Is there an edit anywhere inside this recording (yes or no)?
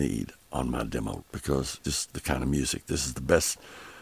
yes